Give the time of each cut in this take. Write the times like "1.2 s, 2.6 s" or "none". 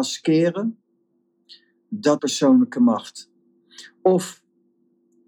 2.2 s